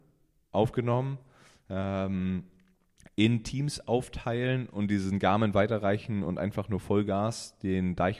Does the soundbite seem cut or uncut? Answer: uncut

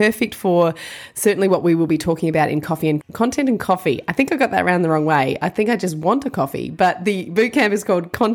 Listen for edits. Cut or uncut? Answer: cut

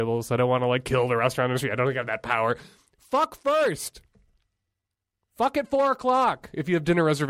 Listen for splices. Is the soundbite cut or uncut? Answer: uncut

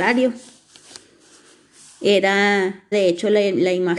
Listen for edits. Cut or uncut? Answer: cut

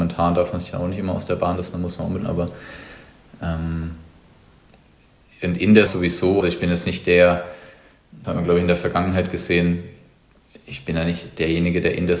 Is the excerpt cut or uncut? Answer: cut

